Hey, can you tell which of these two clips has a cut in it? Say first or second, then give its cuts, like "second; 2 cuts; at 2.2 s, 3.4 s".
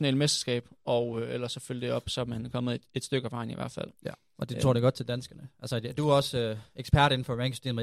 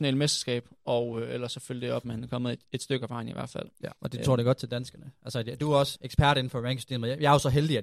second; 3 cuts; at 2.0 s, 4.0 s, 5.9 s